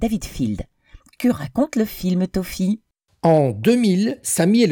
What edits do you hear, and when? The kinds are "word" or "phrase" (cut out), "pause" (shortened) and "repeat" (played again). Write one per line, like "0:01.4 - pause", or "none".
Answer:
none